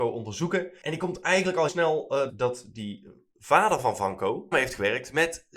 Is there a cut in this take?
yes; 3 cuts; at 1.7 s, 2.3 s, 4.5 s

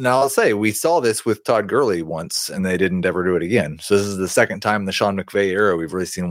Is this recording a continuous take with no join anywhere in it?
no; 1 cut; at 2.6 s

